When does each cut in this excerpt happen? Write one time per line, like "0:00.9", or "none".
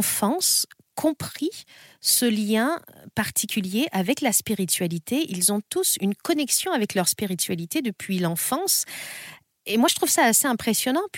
none